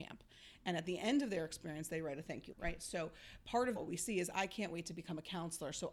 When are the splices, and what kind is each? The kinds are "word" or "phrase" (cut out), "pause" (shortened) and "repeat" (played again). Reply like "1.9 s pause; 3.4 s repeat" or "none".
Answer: 2.5 s word; 3.8 s word